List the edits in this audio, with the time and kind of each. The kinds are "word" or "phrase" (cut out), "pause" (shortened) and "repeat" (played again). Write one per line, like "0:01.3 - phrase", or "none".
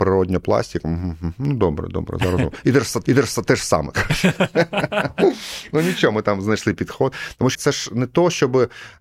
0:03.1 - repeat
0:07.5 - word